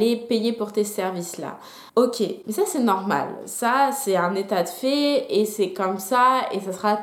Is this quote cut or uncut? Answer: cut